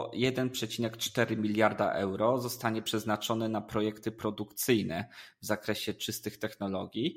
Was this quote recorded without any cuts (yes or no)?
yes